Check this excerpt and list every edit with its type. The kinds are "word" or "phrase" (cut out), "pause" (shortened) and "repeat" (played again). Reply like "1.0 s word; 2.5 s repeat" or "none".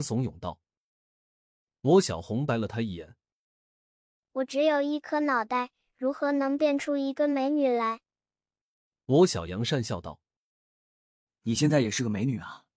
none